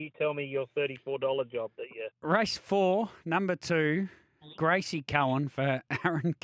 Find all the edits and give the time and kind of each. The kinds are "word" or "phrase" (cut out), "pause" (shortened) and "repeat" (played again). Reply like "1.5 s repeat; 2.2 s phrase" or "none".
none